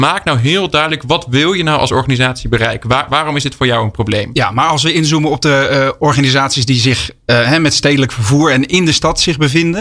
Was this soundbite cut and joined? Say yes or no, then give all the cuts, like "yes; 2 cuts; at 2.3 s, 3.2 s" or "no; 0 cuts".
no; 0 cuts